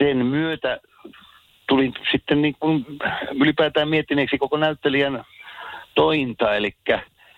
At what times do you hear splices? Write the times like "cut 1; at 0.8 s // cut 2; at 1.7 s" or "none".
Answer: none